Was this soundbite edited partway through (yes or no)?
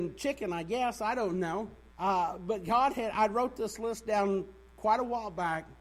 yes